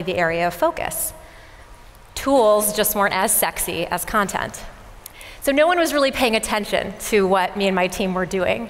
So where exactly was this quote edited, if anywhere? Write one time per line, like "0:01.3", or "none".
none